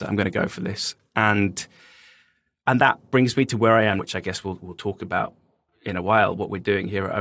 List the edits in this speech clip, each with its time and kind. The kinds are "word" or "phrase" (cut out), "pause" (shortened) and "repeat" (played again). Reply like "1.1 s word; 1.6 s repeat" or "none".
4.0 s word